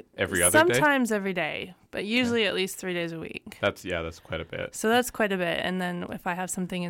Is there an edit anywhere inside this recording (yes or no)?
no